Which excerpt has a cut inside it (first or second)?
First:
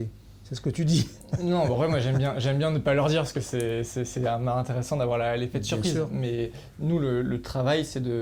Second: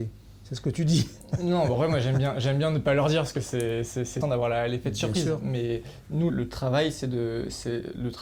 second